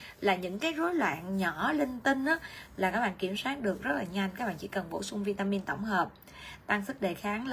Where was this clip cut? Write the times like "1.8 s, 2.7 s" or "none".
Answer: none

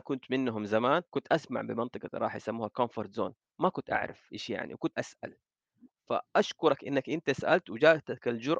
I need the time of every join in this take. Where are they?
1.1 s, 4.9 s

